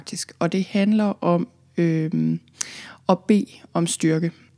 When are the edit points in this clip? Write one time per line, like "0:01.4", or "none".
none